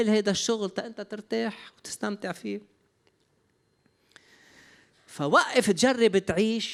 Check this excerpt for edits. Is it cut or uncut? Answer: uncut